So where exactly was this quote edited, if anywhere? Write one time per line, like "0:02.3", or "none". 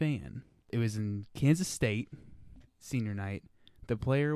0:02.7

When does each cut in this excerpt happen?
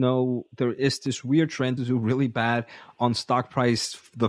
0:01.8

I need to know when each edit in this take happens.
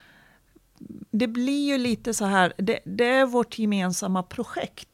0:01.1

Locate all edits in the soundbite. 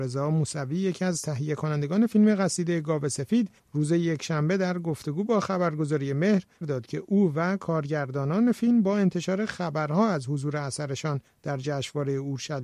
0:06.6

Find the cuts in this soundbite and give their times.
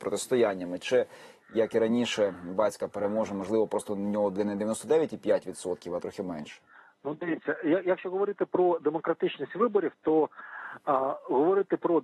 none

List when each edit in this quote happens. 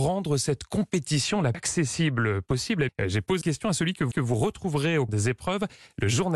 0:01.5
0:02.9
0:03.4
0:04.1
0:05.1

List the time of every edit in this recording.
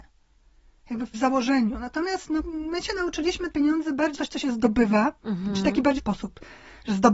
0:01.1
0:02.4
0:03.5
0:04.2
0:06.0

